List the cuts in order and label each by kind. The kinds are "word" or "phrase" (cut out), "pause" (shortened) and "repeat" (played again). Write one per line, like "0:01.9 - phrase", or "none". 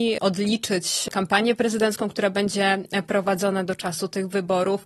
none